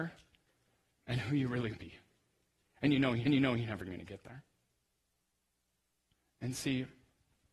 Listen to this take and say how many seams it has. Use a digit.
2